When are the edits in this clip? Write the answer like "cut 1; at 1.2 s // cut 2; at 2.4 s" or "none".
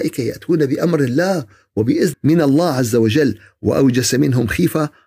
cut 1; at 2.1 s

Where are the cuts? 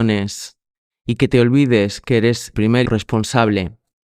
cut 1; at 2.5 s // cut 2; at 2.8 s

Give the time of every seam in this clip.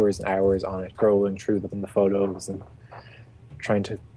cut 1; at 0.9 s // cut 2; at 1.7 s

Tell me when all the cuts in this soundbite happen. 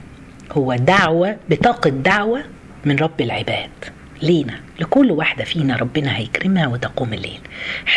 none

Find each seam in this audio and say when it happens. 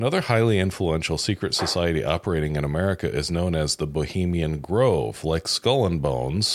none

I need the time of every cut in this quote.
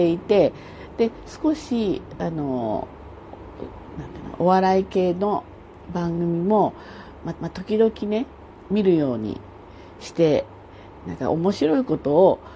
cut 1; at 7.4 s

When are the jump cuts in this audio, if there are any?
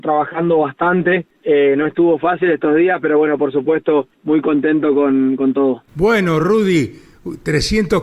cut 1; at 1.3 s // cut 2; at 4.1 s // cut 3; at 5.9 s

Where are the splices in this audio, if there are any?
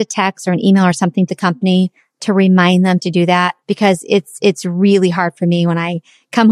cut 1; at 1.3 s // cut 2; at 3.6 s

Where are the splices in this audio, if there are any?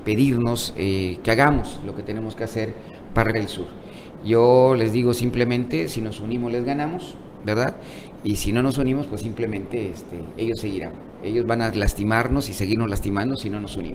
cut 1; at 3.3 s

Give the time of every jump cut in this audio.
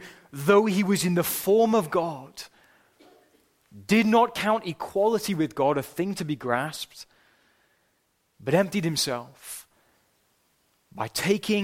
none

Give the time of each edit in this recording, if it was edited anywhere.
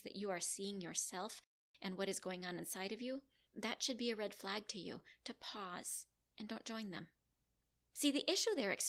none

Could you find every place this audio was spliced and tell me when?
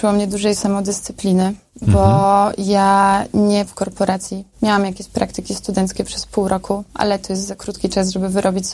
cut 1; at 3.7 s

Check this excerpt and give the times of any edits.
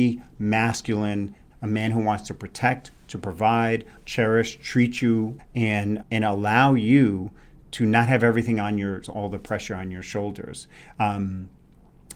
cut 1; at 1.5 s // cut 2; at 4.0 s // cut 3; at 5.4 s // cut 4; at 6.0 s // cut 5; at 7.6 s // cut 6; at 9.0 s

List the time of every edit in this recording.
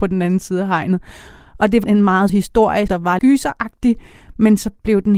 cut 1; at 1.8 s // cut 2; at 2.3 s // cut 3; at 2.9 s // cut 4; at 3.2 s

